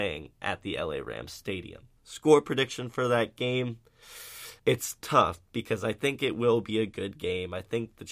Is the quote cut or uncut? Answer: cut